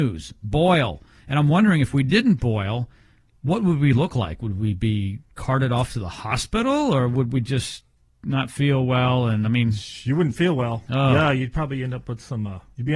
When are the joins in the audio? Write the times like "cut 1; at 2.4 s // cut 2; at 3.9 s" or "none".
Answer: none

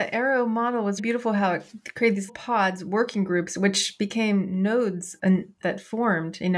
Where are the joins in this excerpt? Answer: cut 1; at 1.0 s // cut 2; at 2.3 s // cut 3; at 5.2 s // cut 4; at 5.6 s

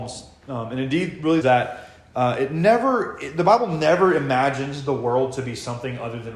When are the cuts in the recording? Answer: cut 1; at 1.4 s

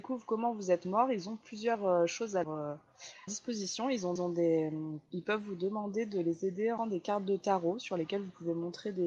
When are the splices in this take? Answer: cut 1; at 2.4 s // cut 2; at 3.3 s // cut 3; at 4.2 s // cut 4; at 6.8 s

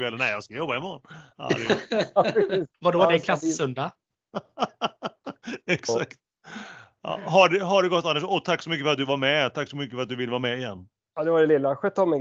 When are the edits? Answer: cut 1; at 2.7 s

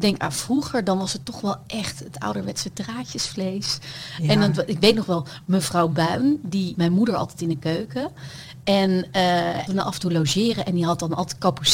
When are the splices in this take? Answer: cut 1; at 6.7 s // cut 2; at 9.7 s

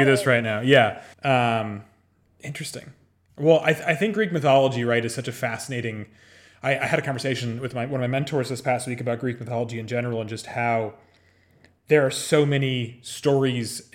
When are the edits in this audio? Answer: cut 1; at 1.1 s

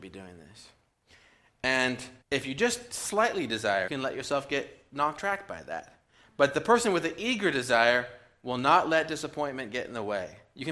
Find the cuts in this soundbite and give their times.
cut 1; at 2.2 s // cut 2; at 3.9 s // cut 3; at 5.2 s

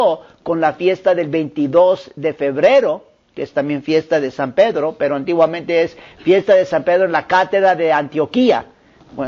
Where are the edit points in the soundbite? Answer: none

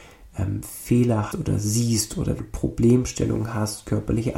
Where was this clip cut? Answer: cut 1; at 1.3 s // cut 2; at 2.4 s

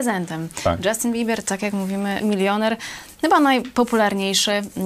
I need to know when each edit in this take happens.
cut 1; at 2.2 s

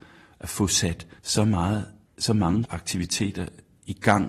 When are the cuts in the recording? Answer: cut 1; at 1.2 s // cut 2; at 2.1 s // cut 3; at 2.7 s

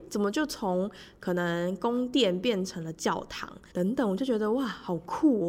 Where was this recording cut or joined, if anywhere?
cut 1; at 3.7 s

